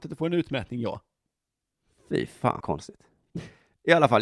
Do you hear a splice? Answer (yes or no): yes